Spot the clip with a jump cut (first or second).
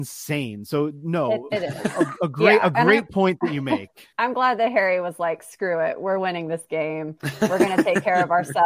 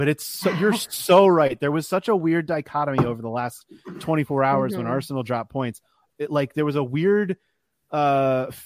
first